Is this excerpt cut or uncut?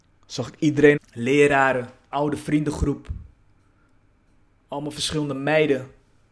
cut